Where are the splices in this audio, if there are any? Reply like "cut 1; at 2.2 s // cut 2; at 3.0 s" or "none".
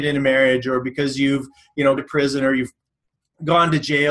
cut 1; at 2.0 s